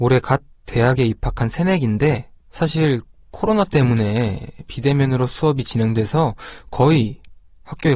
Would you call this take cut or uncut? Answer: uncut